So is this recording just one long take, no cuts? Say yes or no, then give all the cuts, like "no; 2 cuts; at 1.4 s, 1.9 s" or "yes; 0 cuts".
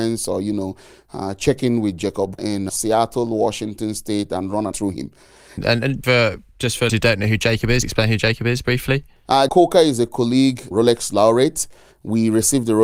no; 8 cuts; at 2.4 s, 2.7 s, 4.7 s, 6.0 s, 6.9 s, 7.8 s, 9.5 s, 10.7 s